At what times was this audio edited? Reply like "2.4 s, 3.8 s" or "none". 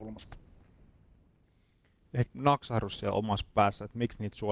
2.3 s